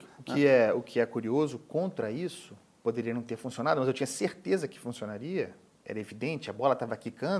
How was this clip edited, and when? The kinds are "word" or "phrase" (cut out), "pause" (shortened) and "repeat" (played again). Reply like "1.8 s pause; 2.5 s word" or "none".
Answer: 2.8 s pause